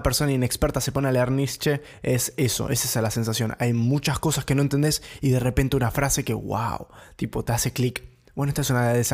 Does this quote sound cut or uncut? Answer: uncut